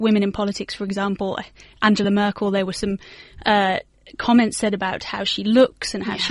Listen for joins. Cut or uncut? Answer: uncut